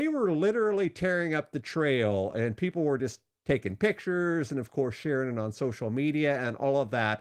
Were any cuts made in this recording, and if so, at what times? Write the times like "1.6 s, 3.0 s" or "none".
none

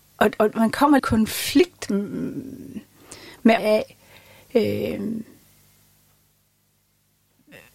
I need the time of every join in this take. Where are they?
1.0 s, 3.6 s

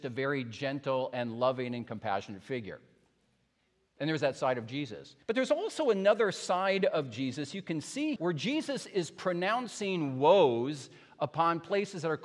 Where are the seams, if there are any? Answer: 5.2 s, 8.2 s

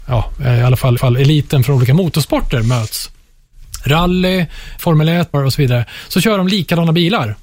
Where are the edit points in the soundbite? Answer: 1.0 s, 4.8 s, 5.3 s

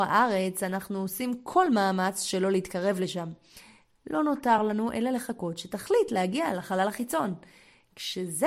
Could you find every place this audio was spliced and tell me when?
none

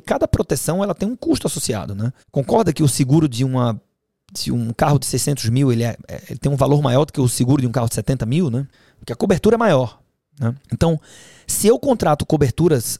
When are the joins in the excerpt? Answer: 2.2 s, 8.7 s, 10.6 s

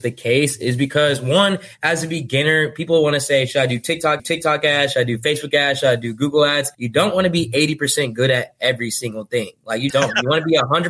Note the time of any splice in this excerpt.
4.2 s, 6.7 s, 9.9 s

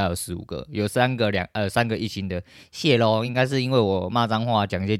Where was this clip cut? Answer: none

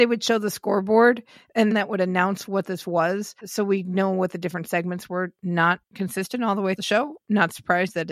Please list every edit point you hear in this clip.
1.7 s, 3.4 s, 5.8 s, 6.8 s

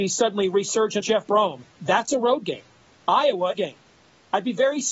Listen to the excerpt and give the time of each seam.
1.0 s, 1.7 s, 3.5 s

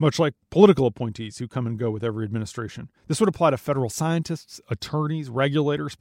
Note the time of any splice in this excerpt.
3.0 s

